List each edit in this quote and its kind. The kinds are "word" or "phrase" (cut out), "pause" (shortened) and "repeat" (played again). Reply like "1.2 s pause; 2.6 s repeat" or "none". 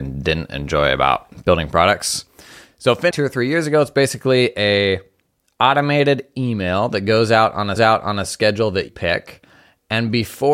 3.1 s phrase; 7.8 s repeat; 8.9 s word